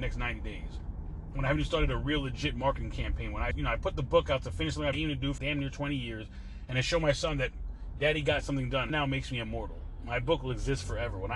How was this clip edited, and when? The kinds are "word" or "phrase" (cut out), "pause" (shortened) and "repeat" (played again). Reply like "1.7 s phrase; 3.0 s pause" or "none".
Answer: 3.5 s word; 4.9 s word; 5.4 s word; 8.9 s phrase